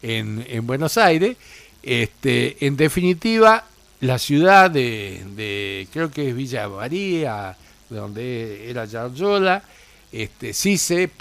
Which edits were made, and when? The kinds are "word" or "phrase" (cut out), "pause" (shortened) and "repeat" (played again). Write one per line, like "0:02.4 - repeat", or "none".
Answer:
none